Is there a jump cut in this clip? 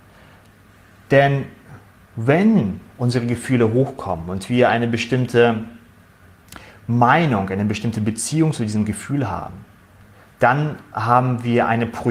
no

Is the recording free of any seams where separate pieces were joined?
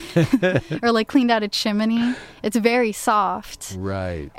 yes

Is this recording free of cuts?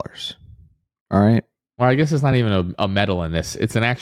yes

